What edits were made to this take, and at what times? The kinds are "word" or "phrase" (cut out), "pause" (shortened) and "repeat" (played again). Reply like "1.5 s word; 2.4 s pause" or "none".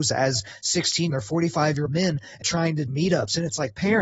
1.1 s phrase; 1.9 s word; 2.4 s word; 2.9 s word